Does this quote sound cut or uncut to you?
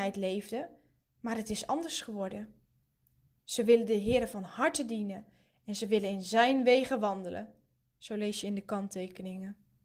uncut